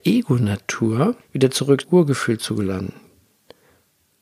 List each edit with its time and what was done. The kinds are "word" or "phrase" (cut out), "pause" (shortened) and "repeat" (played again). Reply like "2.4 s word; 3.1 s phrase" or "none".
1.2 s pause; 1.8 s word